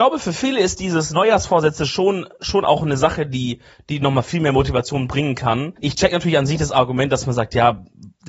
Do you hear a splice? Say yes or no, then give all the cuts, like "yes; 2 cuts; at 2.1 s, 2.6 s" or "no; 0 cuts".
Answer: yes; 1 cut; at 5.8 s